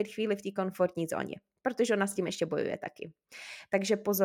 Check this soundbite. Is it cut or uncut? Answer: uncut